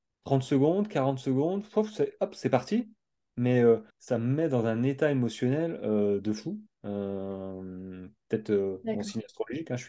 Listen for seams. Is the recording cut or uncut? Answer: cut